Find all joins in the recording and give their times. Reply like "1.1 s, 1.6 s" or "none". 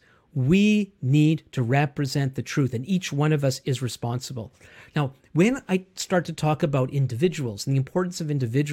none